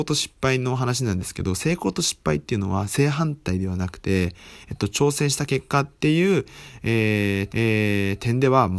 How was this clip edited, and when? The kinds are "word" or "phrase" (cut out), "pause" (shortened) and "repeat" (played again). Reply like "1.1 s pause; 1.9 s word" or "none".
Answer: 6.0 s pause; 7.5 s repeat